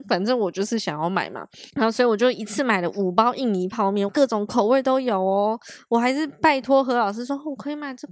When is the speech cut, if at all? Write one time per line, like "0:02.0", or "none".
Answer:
0:01.7
0:04.1